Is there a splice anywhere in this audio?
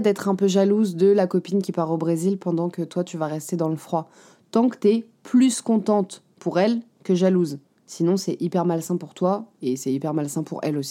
no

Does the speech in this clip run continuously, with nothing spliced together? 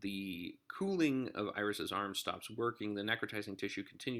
yes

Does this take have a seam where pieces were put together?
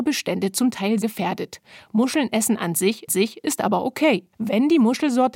yes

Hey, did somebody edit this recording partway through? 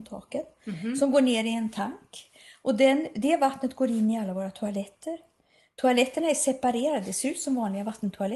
no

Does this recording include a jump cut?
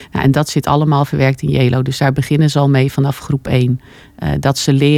no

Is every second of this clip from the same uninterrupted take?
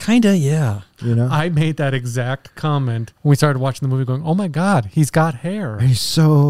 no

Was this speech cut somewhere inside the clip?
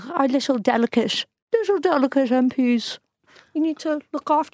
no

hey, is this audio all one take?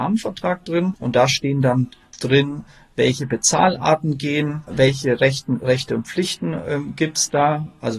yes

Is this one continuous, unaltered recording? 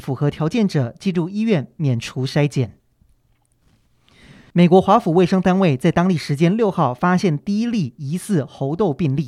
yes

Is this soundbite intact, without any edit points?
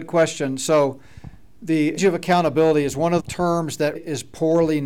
no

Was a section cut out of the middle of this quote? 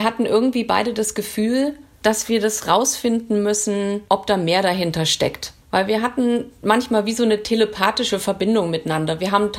yes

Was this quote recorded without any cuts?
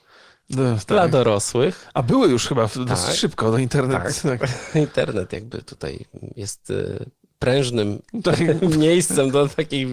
yes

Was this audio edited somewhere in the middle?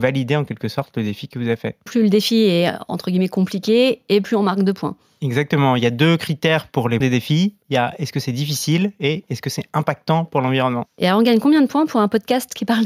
yes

